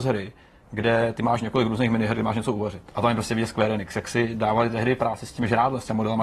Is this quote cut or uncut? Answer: uncut